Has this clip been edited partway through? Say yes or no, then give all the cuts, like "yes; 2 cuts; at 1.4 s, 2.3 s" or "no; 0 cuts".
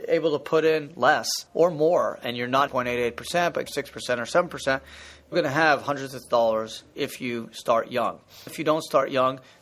yes; 6 cuts; at 1.5 s, 2.7 s, 3.7 s, 5.3 s, 6.2 s, 8.5 s